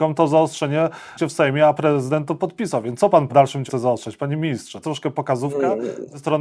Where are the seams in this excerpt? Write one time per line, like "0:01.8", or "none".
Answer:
0:01.2
0:01.7
0:03.3
0:03.7
0:04.8